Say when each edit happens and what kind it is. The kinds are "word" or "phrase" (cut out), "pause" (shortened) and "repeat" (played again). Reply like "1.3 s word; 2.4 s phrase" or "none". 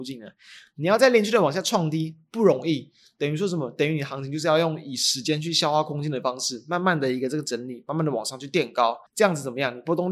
9.1 s pause